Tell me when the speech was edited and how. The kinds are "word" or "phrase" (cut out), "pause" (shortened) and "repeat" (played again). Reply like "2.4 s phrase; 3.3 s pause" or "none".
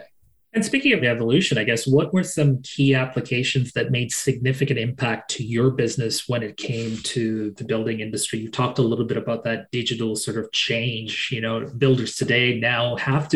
none